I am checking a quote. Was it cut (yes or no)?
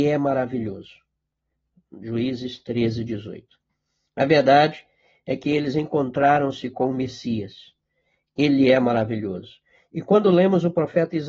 no